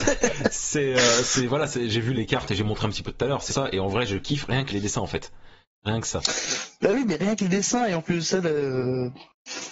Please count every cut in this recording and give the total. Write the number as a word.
three